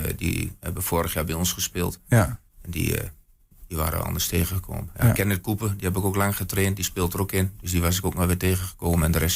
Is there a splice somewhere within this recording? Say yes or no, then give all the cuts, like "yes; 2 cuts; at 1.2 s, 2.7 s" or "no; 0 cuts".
yes; 1 cut; at 2.5 s